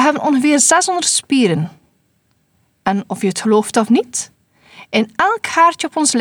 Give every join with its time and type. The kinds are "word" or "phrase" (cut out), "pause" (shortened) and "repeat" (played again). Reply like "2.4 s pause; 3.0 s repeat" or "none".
none

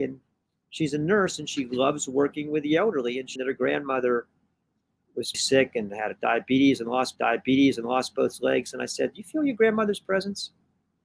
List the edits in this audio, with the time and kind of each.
3.4 s word; 5.3 s word; 7.2 s repeat

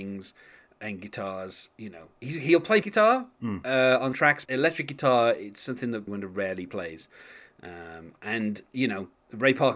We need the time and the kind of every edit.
2.8 s word; 4.1 s word; 4.4 s word; 6.1 s word

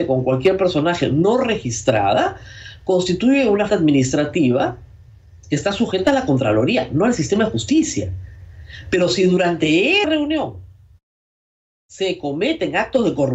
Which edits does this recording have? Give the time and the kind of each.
3.7 s word; 10.0 s word

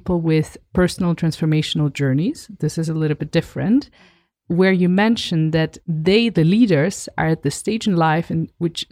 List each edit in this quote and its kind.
none

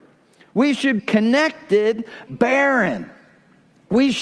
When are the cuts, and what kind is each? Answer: 1.0 s word; 2.3 s phrase

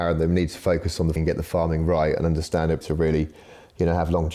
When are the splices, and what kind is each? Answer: 1.2 s word; 2.8 s word

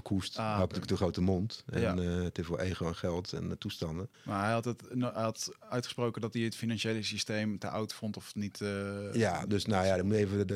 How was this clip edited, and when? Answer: 4.1 s pause

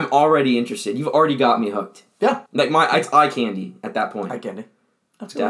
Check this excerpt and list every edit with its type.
2.5 s pause

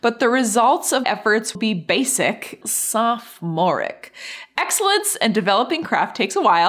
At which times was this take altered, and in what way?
1.0 s word; 1.5 s word; 2.6 s word

